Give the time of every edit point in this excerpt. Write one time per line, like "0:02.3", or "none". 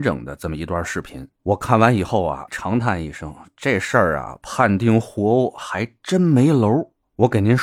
0:02.5